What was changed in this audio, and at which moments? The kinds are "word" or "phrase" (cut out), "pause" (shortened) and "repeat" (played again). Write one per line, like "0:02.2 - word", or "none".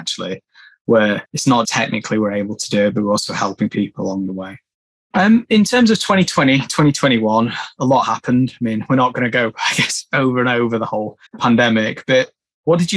0:01.3 - pause
0:01.6 - word
0:11.3 - pause